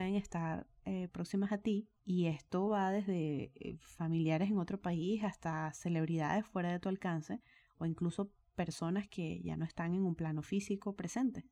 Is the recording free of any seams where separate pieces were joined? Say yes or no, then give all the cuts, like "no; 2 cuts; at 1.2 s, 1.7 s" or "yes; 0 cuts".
yes; 0 cuts